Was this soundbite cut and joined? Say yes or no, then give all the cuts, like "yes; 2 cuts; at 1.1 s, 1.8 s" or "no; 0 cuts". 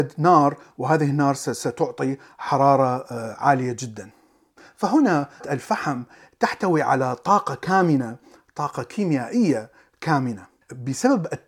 no; 0 cuts